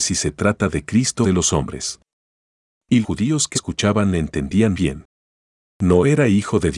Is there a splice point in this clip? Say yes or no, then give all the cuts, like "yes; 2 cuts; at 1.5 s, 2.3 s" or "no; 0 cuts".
yes; 4 cuts; at 1.2 s, 3.0 s, 3.5 s, 4.7 s